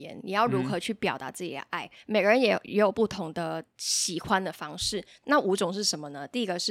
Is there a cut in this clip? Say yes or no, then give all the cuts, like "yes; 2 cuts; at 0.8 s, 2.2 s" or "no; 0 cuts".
no; 0 cuts